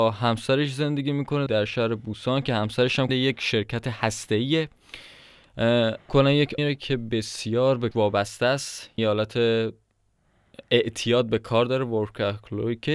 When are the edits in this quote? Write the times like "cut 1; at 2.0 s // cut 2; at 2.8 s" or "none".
cut 1; at 1.5 s // cut 2; at 3.1 s // cut 3; at 6.1 s // cut 4; at 6.6 s // cut 5; at 7.9 s // cut 6; at 9.0 s